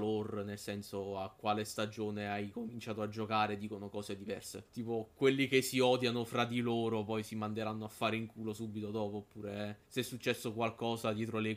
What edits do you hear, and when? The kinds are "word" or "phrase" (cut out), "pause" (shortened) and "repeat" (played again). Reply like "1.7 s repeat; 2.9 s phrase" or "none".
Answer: 4.7 s pause; 9.8 s pause